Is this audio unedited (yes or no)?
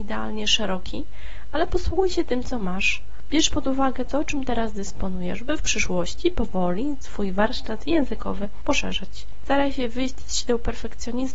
yes